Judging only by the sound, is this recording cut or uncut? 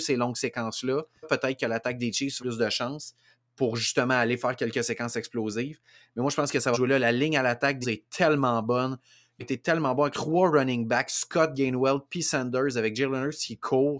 cut